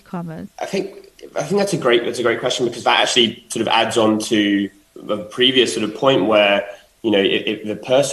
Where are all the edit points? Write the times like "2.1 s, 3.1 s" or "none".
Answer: none